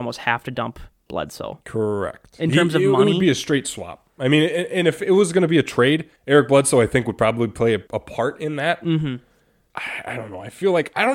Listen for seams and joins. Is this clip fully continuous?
no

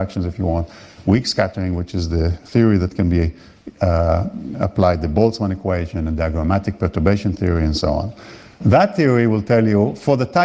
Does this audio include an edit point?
no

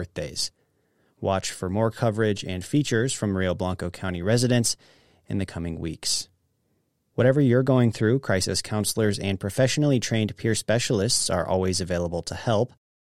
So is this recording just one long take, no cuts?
yes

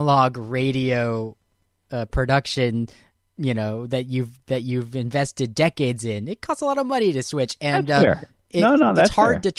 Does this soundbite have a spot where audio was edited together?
no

